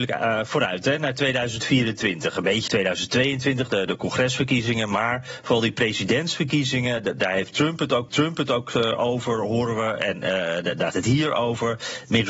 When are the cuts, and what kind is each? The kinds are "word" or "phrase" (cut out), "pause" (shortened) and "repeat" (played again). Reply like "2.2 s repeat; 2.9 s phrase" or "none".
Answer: 2.7 s word; 3.9 s word; 8.1 s repeat; 10.9 s word